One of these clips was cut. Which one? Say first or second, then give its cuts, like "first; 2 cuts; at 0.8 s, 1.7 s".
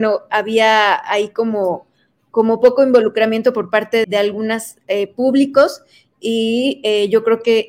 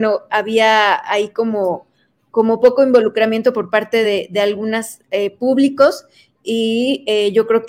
first; 1 cut; at 4.0 s